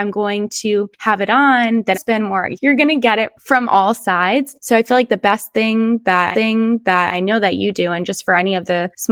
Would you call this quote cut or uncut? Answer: cut